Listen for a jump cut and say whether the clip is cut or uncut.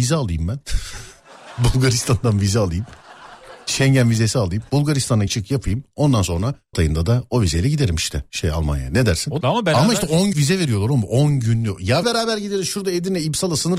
cut